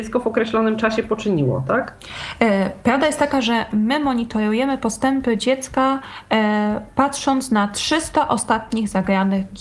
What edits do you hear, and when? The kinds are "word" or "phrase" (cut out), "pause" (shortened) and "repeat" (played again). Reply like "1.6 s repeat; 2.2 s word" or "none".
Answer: none